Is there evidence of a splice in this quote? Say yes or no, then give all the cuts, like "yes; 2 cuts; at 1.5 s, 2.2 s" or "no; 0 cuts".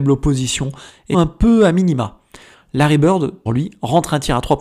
yes; 2 cuts; at 1.1 s, 3.5 s